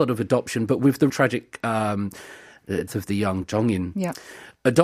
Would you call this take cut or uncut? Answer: cut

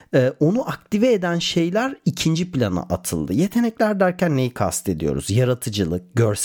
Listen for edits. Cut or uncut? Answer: uncut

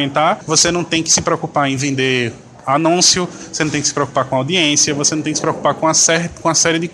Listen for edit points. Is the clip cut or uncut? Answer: uncut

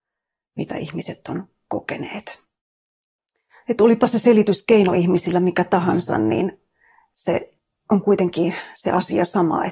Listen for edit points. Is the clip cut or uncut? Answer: uncut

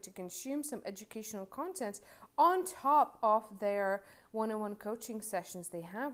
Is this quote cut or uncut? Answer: uncut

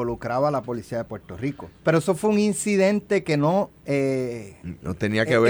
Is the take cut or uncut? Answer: cut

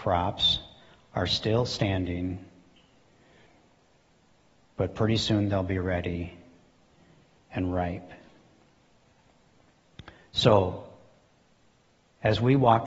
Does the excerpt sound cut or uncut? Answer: uncut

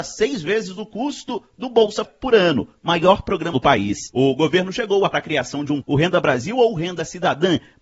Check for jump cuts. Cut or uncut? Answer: cut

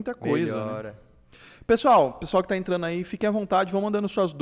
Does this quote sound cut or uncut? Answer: uncut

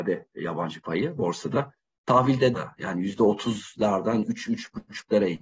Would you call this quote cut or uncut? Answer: cut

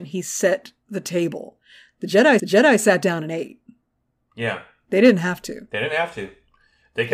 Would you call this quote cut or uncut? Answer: cut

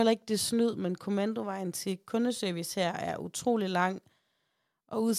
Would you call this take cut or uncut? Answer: uncut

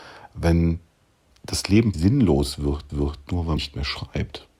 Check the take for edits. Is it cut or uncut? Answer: cut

